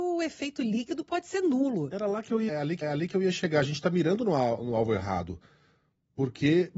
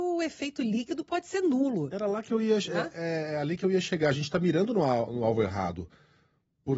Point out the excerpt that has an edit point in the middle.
first; 2 cuts; at 2.5 s, 2.8 s

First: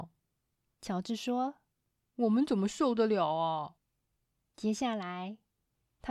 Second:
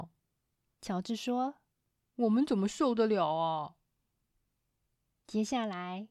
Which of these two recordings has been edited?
first; 1 cut; at 3.8 s

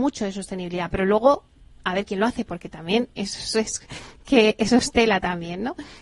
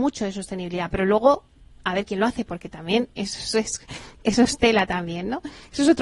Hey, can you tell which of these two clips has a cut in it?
second; 1 cut; at 4.2 s

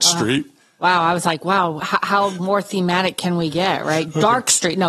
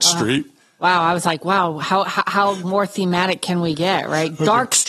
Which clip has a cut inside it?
first; 1 cut; at 1.8 s

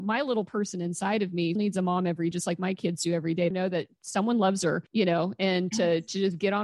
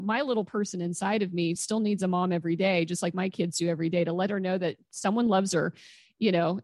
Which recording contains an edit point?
first; 4 cuts; at 1.6 s, 2.3 s, 3.5 s, 4.9 s

